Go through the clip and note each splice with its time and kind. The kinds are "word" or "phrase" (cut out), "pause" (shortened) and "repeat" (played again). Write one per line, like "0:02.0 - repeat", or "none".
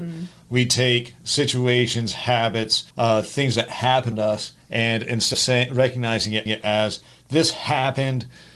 0:02.9 - pause
0:04.1 - word
0:04.6 - pause
0:05.3 - word
0:06.5 - repeat